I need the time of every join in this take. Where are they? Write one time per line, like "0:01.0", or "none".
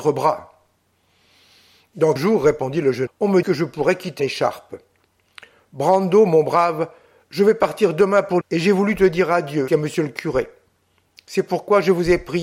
0:02.2
0:03.1
0:03.4
0:04.2
0:08.4
0:09.7